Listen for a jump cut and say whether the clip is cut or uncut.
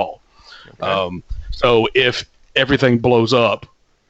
uncut